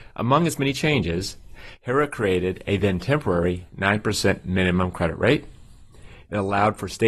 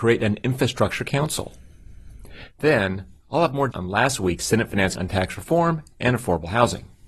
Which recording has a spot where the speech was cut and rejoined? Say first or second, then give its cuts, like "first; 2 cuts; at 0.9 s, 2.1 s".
second; 2 cuts; at 3.7 s, 5.0 s